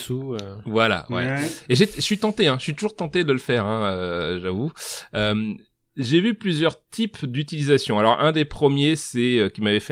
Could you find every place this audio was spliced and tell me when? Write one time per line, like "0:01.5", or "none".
none